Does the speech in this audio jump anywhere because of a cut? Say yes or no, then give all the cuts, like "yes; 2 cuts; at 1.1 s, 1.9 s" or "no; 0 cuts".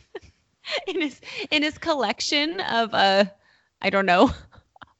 no; 0 cuts